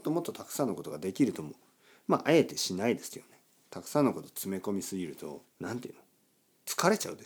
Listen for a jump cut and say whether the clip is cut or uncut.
cut